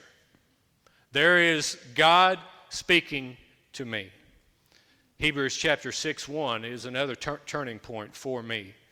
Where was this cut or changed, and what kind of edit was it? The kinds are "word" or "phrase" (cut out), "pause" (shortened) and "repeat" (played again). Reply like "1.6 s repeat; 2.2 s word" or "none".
none